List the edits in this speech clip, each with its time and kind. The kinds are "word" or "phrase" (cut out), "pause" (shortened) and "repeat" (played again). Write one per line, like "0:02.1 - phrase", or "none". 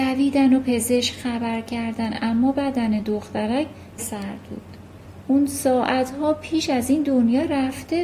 0:04.0 - word